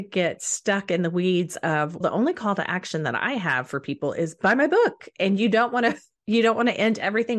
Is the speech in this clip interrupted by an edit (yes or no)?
yes